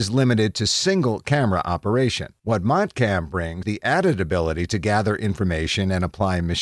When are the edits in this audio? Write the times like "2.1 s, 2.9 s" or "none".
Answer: 2.4 s, 3.6 s